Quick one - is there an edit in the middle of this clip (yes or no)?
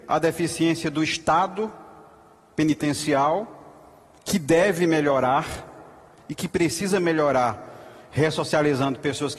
no